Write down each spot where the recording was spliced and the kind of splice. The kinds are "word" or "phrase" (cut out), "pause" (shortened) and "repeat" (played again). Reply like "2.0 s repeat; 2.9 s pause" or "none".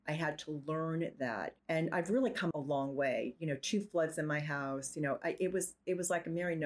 1.6 s pause; 2.5 s word